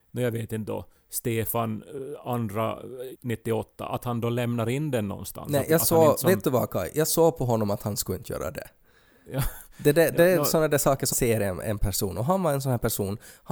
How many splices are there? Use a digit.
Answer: 2